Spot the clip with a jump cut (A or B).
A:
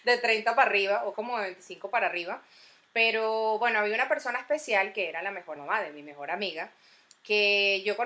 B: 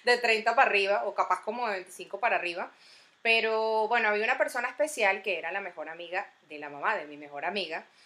A